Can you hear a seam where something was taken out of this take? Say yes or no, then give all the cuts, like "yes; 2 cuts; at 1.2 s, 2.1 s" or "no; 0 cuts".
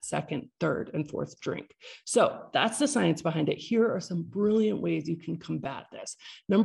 no; 0 cuts